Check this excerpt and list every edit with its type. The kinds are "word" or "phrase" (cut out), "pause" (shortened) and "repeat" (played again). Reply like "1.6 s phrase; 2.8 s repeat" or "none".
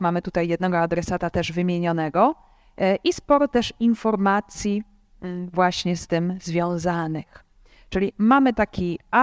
none